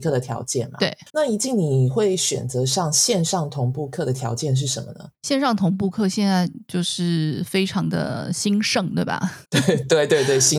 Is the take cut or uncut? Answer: cut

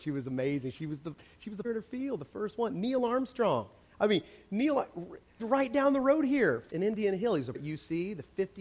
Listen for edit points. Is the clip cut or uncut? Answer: cut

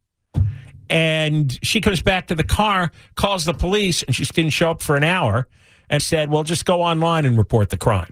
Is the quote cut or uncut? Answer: cut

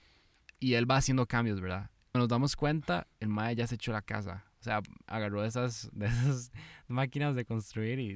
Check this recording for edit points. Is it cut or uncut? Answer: cut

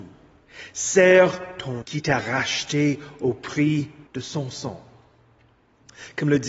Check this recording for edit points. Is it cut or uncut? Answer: cut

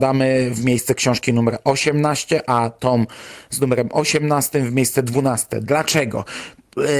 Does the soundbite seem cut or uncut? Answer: uncut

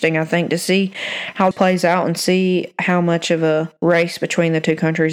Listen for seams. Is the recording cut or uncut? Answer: cut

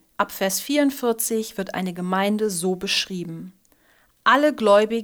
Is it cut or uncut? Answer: uncut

